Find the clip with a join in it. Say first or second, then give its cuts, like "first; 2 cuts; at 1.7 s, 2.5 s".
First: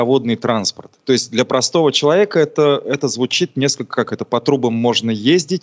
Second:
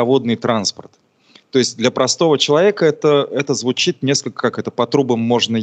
first; 1 cut; at 1.0 s